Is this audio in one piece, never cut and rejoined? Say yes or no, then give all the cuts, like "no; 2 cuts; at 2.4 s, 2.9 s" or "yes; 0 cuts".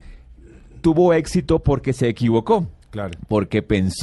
yes; 0 cuts